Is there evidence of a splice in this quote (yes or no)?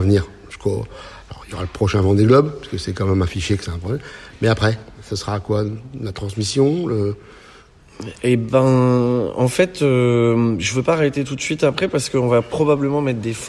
no